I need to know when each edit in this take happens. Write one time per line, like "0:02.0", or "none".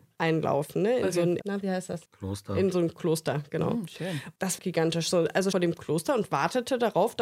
0:01.4
0:02.1
0:04.6
0:05.5